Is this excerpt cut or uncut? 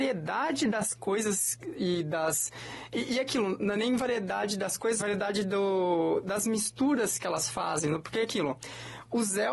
cut